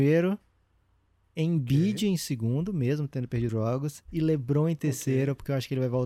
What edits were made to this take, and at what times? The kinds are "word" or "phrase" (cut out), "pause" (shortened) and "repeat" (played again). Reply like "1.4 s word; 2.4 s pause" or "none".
3.5 s word